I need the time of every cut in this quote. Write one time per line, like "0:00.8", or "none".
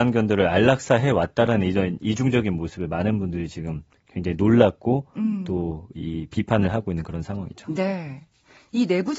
none